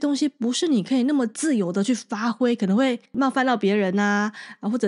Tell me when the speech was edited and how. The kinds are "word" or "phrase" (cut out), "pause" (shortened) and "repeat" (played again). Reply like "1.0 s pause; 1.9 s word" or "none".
3.0 s pause